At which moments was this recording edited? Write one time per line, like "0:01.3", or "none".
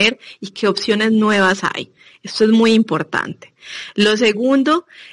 none